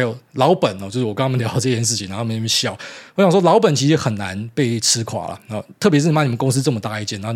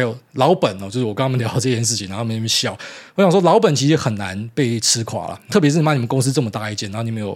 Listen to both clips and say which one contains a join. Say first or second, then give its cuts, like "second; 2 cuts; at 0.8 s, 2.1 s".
second; 1 cut; at 5.5 s